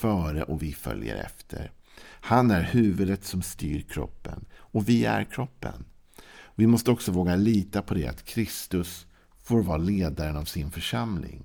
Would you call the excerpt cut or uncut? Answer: uncut